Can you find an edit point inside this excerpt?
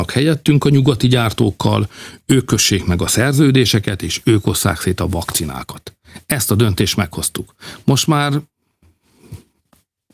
no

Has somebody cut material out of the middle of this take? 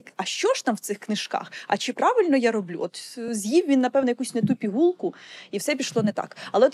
no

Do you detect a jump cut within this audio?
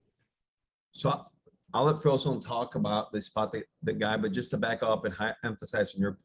no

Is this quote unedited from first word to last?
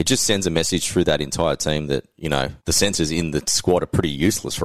no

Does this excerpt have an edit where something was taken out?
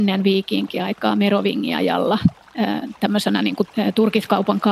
no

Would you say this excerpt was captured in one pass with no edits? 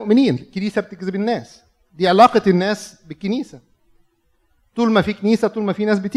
yes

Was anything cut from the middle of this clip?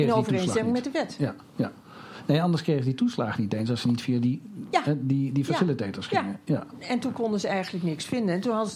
no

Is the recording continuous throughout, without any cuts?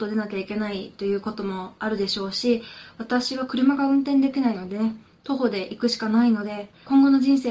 yes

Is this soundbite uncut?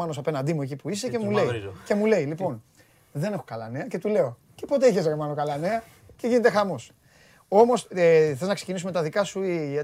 yes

